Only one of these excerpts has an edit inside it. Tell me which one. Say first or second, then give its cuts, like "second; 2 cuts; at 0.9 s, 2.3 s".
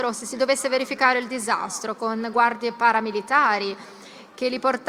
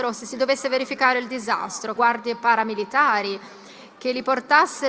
second; 1 cut; at 2.0 s